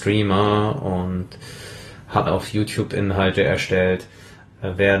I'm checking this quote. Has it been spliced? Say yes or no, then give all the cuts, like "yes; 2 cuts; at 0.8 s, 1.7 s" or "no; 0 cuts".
yes; 1 cut; at 2.3 s